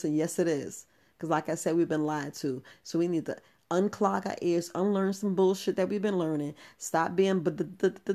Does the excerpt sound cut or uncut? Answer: uncut